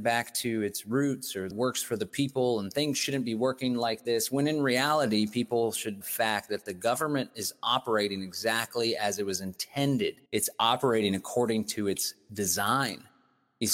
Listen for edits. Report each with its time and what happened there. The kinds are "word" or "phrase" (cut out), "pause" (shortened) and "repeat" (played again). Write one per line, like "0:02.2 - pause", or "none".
0:01.5 - phrase
0:06.0 - phrase
0:10.3 - pause